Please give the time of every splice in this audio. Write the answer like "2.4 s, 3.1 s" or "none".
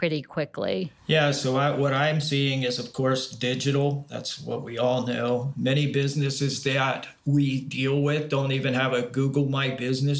1.0 s